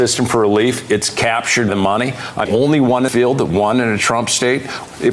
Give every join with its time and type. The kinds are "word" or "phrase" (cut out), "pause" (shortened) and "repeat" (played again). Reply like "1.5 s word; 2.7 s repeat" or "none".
1.7 s word; 2.5 s word; 3.1 s word